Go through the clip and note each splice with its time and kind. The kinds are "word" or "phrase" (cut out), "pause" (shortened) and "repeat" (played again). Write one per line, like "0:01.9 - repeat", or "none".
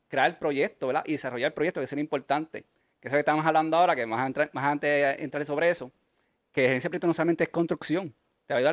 none